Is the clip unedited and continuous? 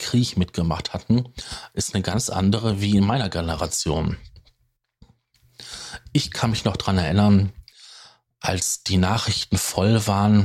yes; 0 cuts

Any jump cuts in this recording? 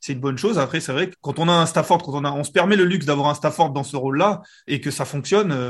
yes; 2 cuts; at 1.1 s, 4.7 s

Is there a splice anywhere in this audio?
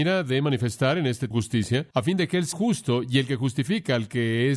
yes; 3 cuts; at 1.3 s, 1.9 s, 2.5 s

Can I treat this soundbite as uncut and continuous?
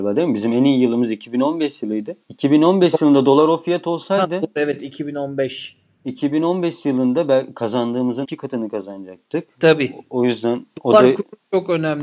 no; 2 cuts; at 2.2 s, 8.2 s

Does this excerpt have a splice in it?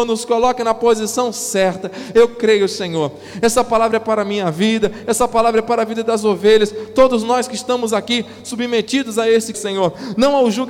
yes; 1 cut; at 9.5 s

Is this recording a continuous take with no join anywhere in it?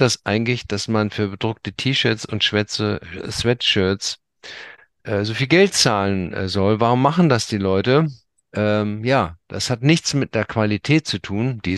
yes; 0 cuts

